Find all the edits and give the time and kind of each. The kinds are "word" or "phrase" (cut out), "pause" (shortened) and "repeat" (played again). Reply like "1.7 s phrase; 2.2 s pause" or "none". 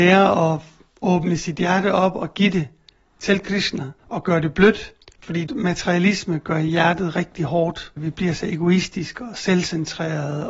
none

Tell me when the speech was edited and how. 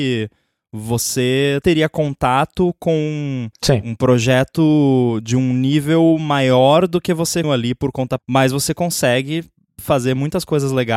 1.6 s word; 3.5 s pause; 7.4 s phrase; 8.2 s phrase

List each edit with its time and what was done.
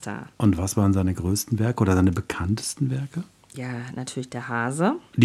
none

